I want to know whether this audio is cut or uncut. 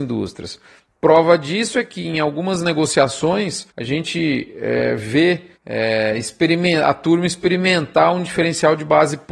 cut